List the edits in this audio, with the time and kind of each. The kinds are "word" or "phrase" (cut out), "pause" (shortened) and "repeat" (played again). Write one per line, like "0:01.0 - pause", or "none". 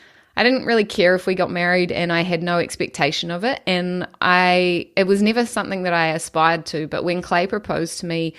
none